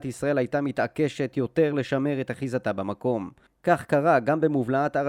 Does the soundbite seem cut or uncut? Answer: uncut